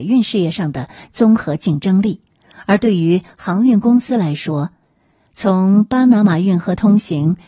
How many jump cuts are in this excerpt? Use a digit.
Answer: 0